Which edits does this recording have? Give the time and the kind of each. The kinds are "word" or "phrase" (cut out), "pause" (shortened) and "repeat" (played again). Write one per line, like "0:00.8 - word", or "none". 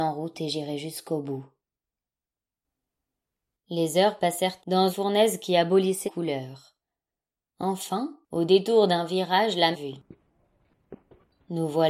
0:04.6 - word
0:04.9 - word
0:06.0 - word
0:08.2 - pause
0:09.7 - phrase